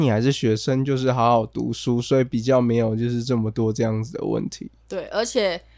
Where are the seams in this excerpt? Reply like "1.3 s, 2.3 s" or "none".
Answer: none

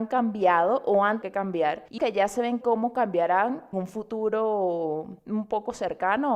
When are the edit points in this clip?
1.2 s, 2.0 s, 2.6 s, 3.7 s, 5.2 s

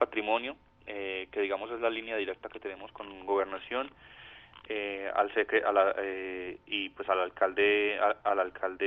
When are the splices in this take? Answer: none

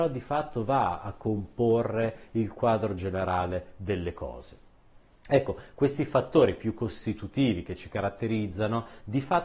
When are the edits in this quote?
none

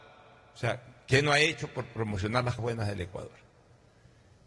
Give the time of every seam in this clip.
2.6 s

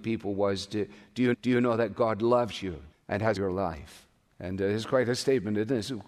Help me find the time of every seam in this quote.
1.3 s, 2.9 s, 3.4 s, 4.3 s

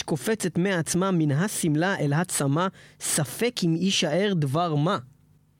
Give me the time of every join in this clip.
none

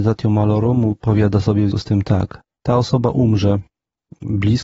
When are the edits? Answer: 1.7 s, 2.5 s

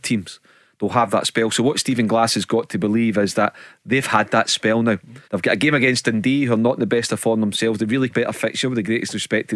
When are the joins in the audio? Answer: 5.2 s, 8.1 s

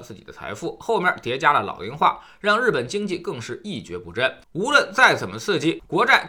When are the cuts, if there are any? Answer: 4.4 s

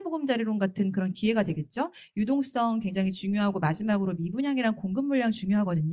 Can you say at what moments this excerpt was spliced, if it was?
none

